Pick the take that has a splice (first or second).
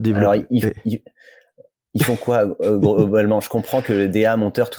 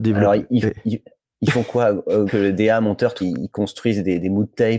second